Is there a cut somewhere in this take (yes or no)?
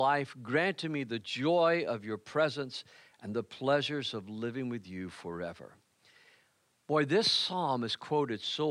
no